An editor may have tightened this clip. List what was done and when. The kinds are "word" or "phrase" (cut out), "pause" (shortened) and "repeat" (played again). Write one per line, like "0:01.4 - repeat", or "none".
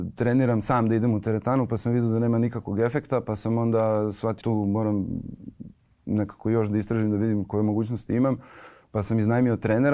0:04.4 - word